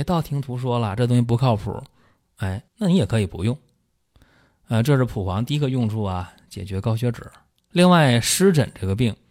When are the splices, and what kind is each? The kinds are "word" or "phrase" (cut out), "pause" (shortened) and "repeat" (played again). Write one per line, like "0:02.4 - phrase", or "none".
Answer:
0:02.7 - pause